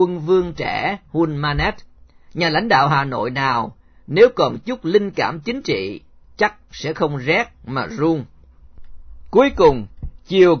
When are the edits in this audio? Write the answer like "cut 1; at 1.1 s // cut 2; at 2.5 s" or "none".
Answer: none

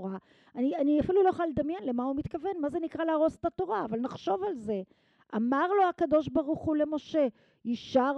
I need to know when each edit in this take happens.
none

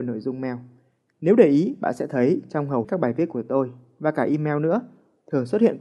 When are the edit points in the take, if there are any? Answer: cut 1; at 2.8 s

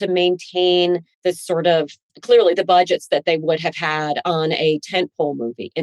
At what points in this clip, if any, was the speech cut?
cut 1; at 1.1 s // cut 2; at 2.1 s

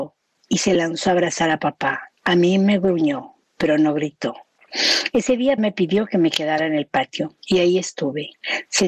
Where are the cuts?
cut 1; at 2.2 s // cut 2; at 5.6 s // cut 3; at 7.4 s

